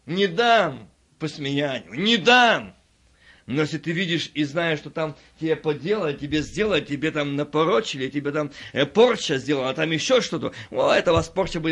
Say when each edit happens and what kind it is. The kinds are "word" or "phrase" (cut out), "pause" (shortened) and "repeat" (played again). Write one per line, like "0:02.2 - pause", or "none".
none

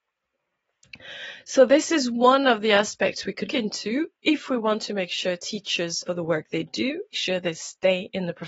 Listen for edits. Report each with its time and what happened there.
0:03.5 - word
0:06.1 - phrase
0:07.1 - phrase

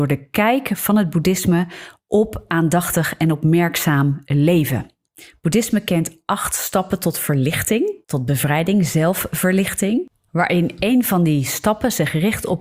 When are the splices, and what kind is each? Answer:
0:08.0 - pause

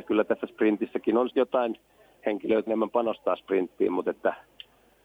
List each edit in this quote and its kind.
0:01.3 - phrase
0:02.7 - word

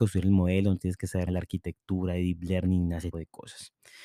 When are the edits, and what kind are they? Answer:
0:01.3 - word
0:03.1 - word

